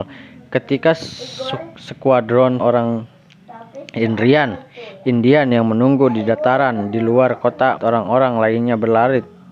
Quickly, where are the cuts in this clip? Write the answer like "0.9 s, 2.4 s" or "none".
2.6 s, 7.8 s